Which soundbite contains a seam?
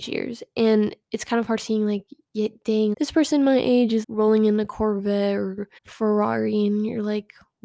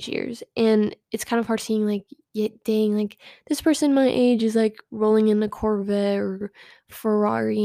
first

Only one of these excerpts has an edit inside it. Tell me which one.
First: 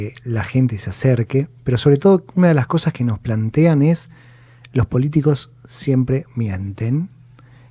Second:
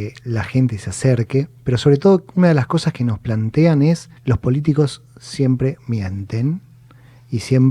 second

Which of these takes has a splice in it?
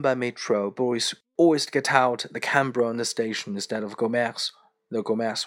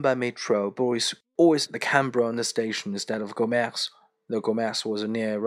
second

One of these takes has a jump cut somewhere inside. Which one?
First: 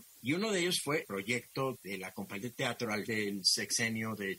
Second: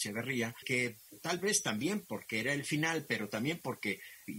first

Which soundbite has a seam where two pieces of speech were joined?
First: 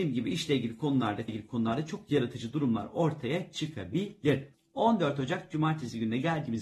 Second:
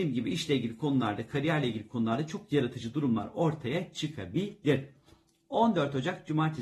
first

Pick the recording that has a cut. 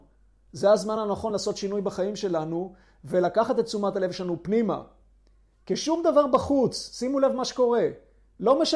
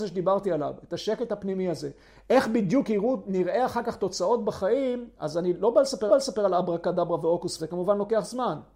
second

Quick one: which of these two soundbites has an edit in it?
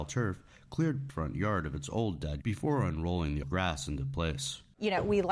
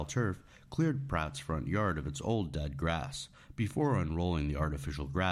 first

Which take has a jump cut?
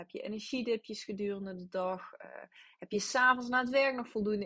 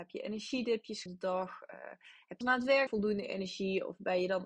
second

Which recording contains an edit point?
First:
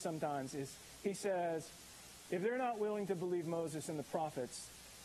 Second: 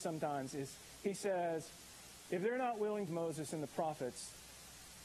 second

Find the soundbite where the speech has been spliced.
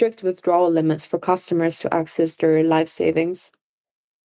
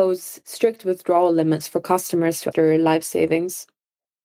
second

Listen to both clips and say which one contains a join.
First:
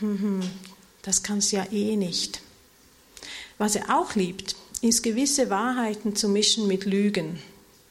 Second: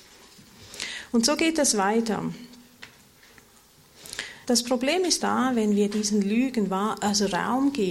second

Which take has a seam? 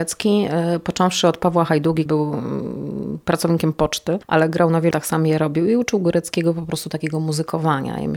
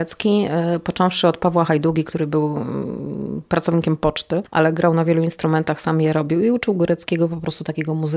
first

